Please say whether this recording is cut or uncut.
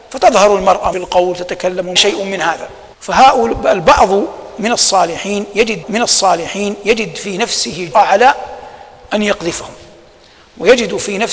cut